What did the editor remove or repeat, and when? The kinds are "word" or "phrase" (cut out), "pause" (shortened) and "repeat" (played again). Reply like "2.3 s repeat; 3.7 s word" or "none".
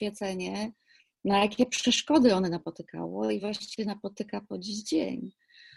none